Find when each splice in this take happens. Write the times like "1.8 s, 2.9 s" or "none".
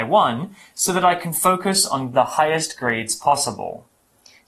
2.1 s